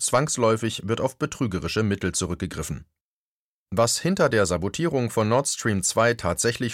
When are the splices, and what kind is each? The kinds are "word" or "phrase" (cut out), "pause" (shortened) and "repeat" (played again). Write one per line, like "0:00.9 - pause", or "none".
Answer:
none